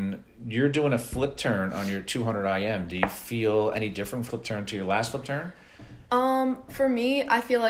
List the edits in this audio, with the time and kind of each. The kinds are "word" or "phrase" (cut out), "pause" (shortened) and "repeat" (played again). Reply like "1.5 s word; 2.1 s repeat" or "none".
4.3 s phrase